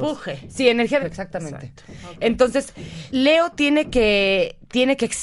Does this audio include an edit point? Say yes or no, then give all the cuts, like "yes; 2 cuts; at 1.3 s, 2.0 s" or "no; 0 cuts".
yes; 2 cuts; at 1.0 s, 3.1 s